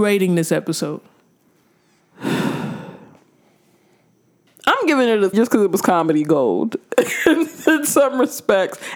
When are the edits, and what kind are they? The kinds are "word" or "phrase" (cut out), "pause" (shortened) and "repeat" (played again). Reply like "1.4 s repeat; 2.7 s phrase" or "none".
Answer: 5.3 s word